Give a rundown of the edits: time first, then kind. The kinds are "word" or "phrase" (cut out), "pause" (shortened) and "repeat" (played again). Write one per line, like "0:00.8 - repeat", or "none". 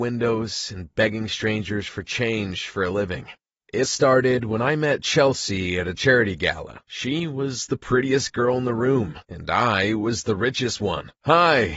0:03.8 - word